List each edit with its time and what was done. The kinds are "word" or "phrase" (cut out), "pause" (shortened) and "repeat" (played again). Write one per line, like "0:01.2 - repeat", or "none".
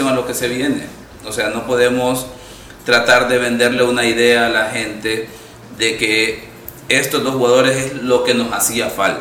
none